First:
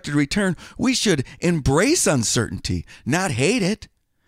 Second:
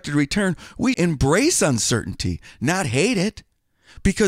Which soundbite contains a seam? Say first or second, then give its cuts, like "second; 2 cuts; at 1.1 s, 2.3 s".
second; 1 cut; at 0.9 s